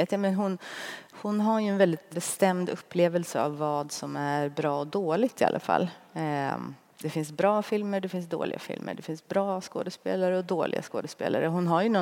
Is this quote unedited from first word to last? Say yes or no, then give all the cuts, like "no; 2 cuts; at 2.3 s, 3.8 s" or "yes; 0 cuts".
no; 1 cut; at 2.1 s